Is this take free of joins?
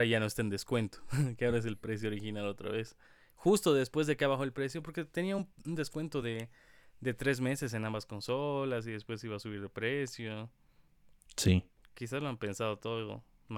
yes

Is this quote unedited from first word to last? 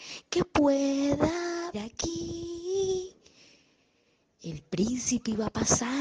no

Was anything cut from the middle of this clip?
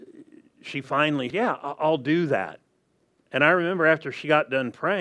yes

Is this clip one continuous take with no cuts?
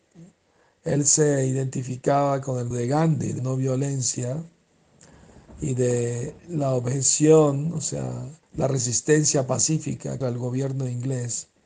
no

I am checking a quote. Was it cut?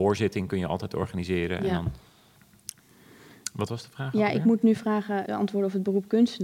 yes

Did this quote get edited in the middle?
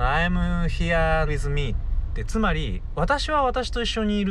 yes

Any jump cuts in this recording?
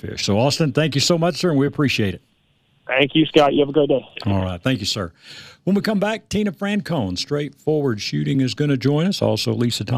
no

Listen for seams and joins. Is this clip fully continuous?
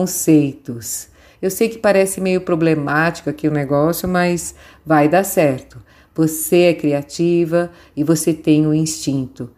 yes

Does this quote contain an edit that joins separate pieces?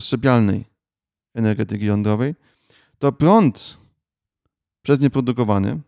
no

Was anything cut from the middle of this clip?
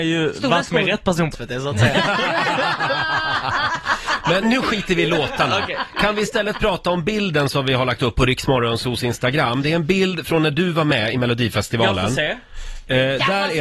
yes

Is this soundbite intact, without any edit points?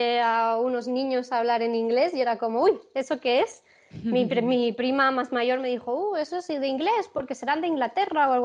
yes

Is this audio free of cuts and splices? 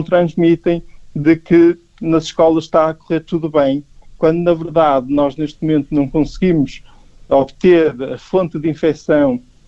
yes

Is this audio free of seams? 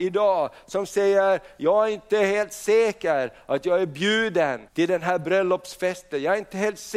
no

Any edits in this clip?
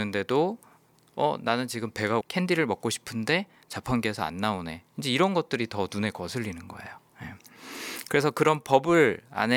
yes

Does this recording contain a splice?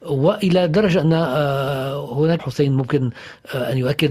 yes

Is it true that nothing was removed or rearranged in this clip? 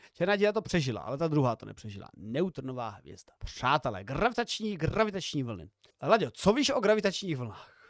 no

